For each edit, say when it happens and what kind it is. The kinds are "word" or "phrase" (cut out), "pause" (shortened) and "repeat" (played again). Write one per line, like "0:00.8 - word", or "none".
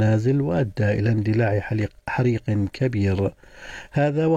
none